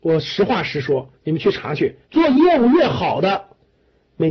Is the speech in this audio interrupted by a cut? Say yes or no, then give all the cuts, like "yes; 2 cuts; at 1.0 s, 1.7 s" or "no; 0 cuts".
yes; 2 cuts; at 1.2 s, 2.0 s